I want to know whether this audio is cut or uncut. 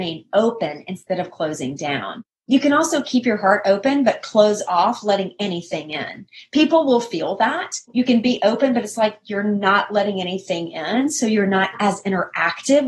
uncut